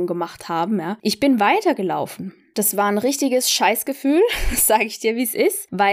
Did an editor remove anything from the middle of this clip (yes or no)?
no